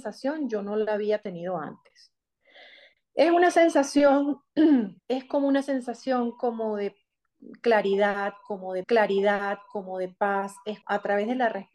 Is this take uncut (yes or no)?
no